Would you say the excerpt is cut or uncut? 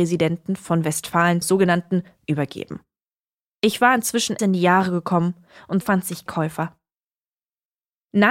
cut